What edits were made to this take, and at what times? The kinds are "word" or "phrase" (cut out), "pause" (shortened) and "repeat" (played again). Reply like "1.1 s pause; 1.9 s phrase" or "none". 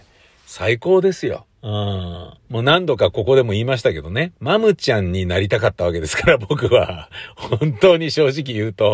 1.5 s pause; 2.4 s pause; 4.3 s pause